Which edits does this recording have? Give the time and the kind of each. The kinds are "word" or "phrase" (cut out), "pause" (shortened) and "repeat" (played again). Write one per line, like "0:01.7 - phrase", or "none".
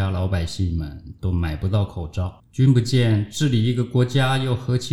0:02.4 - pause

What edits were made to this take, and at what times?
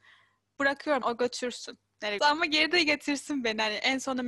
0:01.0 - word
0:02.2 - word

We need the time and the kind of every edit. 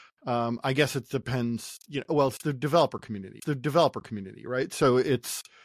0:03.4 - repeat

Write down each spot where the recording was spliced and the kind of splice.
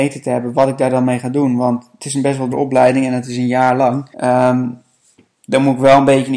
0:02.5 - word
0:04.1 - pause

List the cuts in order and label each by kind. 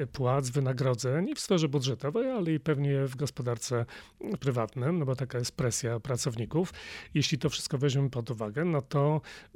0:04.4 - word

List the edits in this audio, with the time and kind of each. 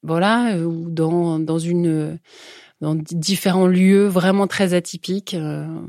none

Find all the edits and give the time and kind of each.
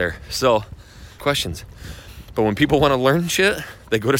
0:01.2 - phrase

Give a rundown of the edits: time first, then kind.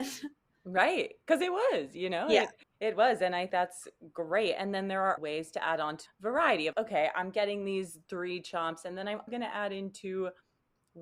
0:02.6 - pause
0:03.5 - word
0:05.2 - word
0:06.1 - phrase
0:06.7 - word
0:09.3 - word

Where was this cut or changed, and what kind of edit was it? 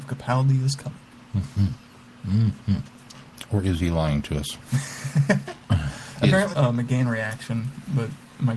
0:06.5 - phrase

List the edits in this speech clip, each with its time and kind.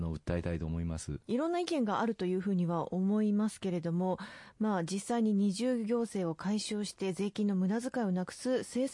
0:01.2 - pause

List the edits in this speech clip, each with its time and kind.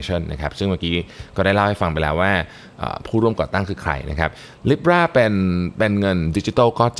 none

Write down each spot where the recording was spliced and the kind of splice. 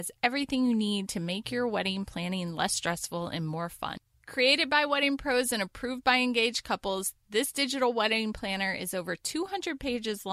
none

